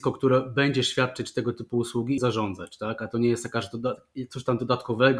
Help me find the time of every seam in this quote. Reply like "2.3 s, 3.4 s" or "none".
2.2 s